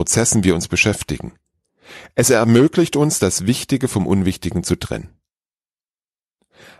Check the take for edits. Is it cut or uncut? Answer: uncut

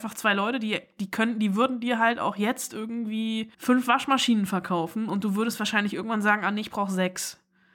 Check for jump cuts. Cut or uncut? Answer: cut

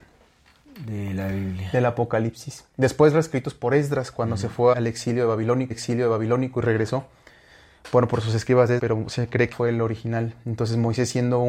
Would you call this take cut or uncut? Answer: cut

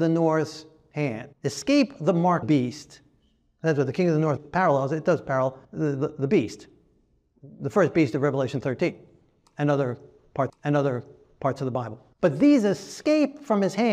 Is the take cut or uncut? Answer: cut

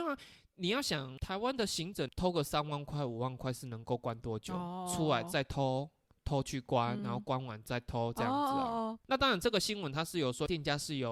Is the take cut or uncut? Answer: cut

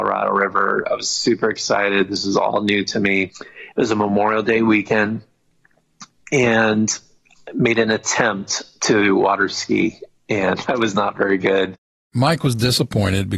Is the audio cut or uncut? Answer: uncut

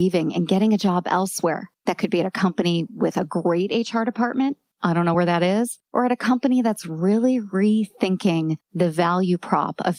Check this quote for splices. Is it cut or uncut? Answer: uncut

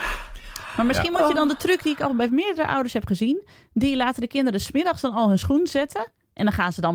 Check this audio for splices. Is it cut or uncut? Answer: uncut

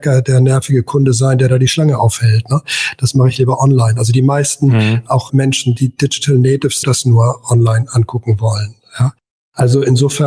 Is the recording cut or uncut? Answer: cut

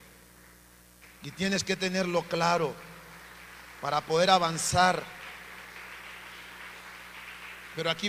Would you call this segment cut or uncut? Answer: uncut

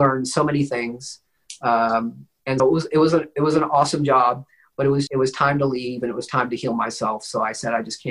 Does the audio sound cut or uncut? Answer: cut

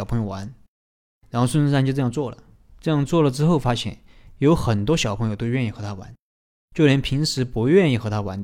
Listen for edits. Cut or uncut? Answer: cut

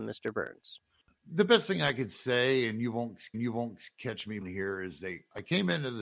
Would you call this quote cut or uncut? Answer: cut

